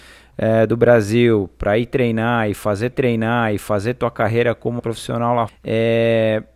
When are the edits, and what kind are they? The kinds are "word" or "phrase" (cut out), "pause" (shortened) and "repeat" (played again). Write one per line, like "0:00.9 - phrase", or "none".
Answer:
0:02.9 - repeat
0:04.8 - word
0:05.5 - word